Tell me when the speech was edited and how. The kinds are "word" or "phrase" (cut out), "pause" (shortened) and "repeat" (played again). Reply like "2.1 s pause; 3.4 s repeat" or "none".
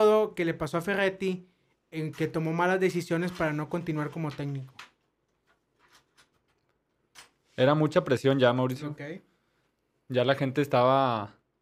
none